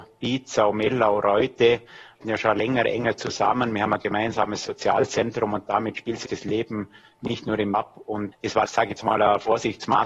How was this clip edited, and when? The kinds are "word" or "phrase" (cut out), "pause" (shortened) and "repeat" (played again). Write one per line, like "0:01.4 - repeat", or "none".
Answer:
0:02.2 - word
0:06.3 - word
0:07.7 - word
0:08.3 - word
0:08.7 - word